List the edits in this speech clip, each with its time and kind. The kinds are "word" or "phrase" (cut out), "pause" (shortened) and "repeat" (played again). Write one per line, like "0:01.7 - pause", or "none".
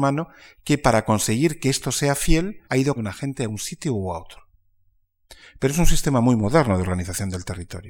0:02.6 - pause
0:03.0 - word